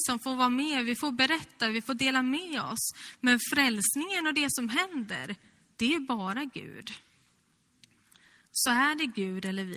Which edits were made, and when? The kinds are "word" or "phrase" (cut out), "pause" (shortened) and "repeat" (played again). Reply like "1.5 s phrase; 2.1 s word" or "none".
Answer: none

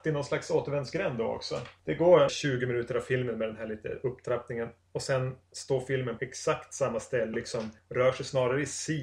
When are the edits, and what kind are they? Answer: 2.3 s word; 6.2 s word; 7.3 s word

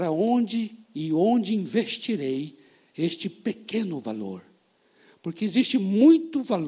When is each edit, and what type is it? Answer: none

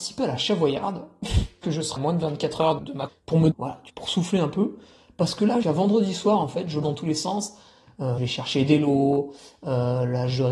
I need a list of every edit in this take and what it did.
1.6 s word; 2.0 s word; 2.8 s word; 3.1 s word; 3.5 s word; 3.9 s word; 5.6 s word; 6.8 s word; 8.2 s word

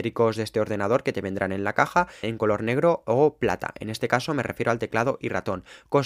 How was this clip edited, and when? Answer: 2.2 s word

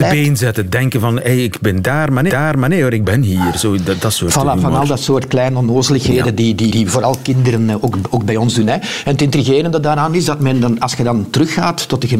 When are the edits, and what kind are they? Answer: 2.3 s repeat; 6.7 s word

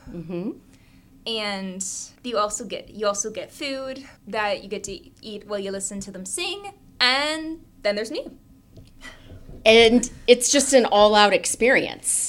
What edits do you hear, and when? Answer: 2.2 s pause; 4.2 s pause

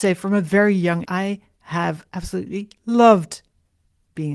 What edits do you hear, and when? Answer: 1.0 s word

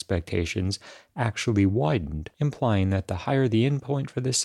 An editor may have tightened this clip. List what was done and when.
2.3 s pause

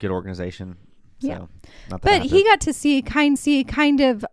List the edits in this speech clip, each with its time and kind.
3.4 s repeat

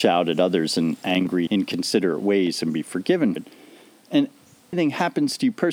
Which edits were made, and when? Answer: 1.5 s word; 3.4 s word; 4.7 s phrase

